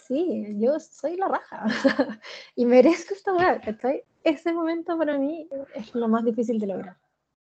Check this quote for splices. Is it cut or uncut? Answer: uncut